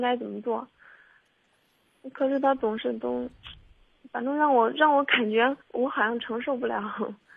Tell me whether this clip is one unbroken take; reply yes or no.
no